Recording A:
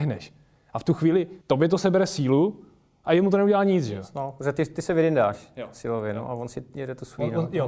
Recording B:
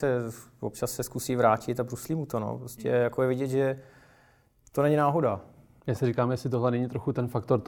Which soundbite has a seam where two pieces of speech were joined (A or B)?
A